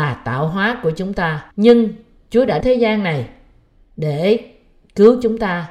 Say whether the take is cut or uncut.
cut